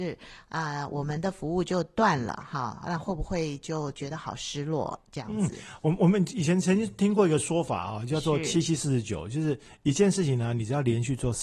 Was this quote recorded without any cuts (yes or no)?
yes